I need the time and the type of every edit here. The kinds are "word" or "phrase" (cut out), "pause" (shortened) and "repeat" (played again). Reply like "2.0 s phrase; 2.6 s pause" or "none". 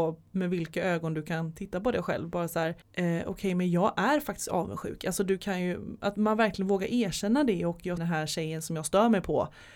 2.8 s pause; 8.0 s phrase